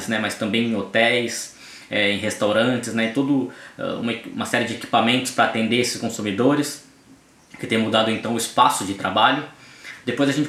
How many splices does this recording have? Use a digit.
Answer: 0